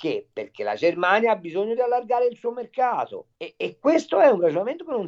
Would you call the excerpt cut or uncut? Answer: cut